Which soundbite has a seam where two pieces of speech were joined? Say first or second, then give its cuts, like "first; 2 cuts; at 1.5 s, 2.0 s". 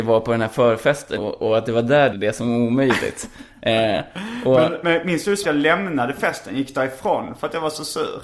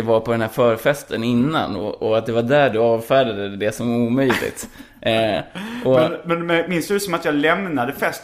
first; 4 cuts; at 1.2 s, 2.1 s, 4.8 s, 5.4 s